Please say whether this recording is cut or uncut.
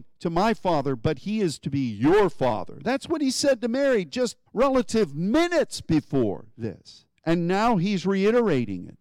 cut